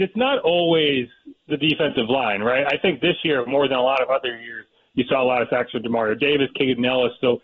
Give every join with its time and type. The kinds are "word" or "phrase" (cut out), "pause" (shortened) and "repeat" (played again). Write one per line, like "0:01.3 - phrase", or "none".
none